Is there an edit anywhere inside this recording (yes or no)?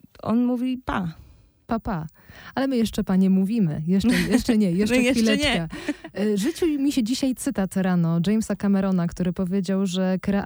no